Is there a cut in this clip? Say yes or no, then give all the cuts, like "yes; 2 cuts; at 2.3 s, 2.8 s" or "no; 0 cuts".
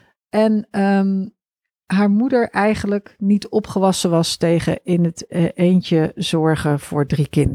no; 0 cuts